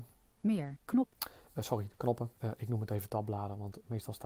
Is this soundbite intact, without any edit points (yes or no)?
no